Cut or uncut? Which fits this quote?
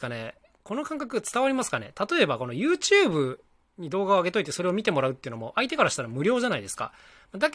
uncut